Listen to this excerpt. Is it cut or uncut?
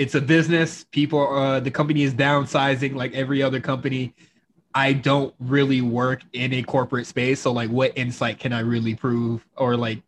cut